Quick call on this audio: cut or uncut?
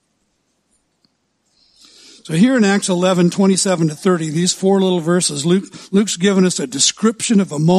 uncut